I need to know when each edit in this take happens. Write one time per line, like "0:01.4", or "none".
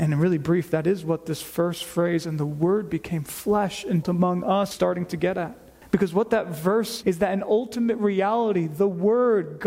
0:04.0
0:04.7
0:05.8
0:07.0